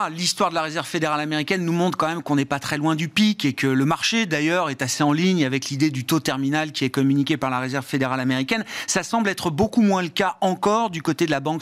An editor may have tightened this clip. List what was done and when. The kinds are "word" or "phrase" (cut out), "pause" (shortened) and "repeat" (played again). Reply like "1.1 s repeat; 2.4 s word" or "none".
none